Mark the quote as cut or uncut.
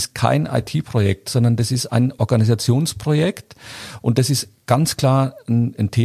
uncut